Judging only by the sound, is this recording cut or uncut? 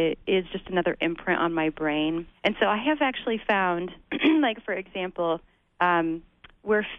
cut